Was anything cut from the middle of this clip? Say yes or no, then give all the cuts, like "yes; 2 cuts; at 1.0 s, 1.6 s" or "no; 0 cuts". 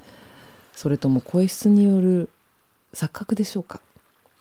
no; 0 cuts